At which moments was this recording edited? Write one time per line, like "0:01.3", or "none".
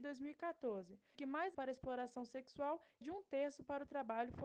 0:01.1
0:01.5
0:03.0